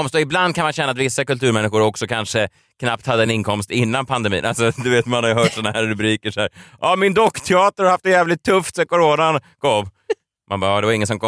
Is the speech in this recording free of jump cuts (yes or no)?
yes